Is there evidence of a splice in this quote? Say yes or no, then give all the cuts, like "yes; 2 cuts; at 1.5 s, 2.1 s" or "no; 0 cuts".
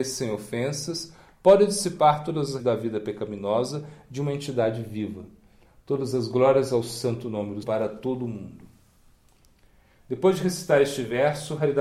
yes; 2 cuts; at 2.6 s, 7.6 s